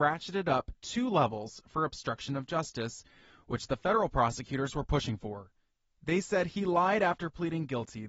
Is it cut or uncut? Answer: uncut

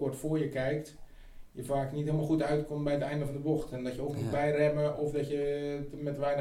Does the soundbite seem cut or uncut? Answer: uncut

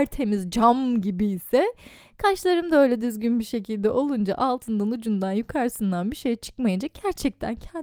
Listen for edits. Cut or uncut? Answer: uncut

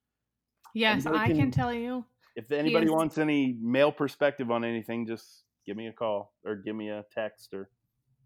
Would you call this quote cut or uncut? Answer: uncut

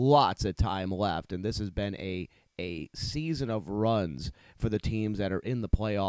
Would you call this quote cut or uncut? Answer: uncut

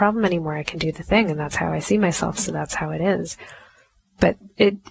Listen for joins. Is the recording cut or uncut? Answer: uncut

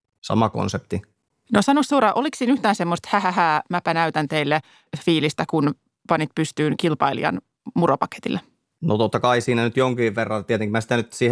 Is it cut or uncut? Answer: uncut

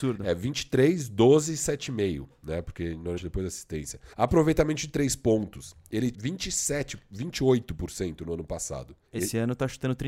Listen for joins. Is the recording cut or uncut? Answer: cut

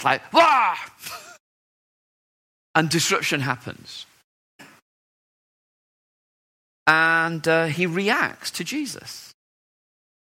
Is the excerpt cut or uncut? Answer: uncut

